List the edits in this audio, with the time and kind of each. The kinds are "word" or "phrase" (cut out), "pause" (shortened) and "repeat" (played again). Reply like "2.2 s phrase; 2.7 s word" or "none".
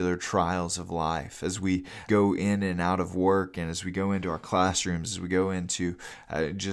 2.1 s word